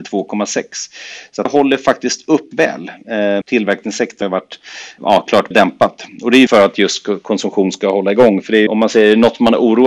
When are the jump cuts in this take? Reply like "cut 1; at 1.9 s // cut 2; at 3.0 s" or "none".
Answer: cut 1; at 1.5 s // cut 2; at 2.5 s // cut 3; at 3.4 s // cut 4; at 4.2 s // cut 5; at 5.0 s // cut 6; at 5.5 s // cut 7; at 6.5 s // cut 8; at 8.7 s